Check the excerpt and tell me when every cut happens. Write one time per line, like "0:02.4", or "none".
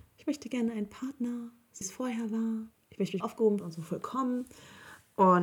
0:01.8
0:03.2
0:03.6